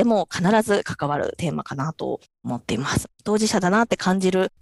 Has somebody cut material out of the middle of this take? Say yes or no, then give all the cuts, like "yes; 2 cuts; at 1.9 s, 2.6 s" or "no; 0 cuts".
yes; 1 cut; at 3.1 s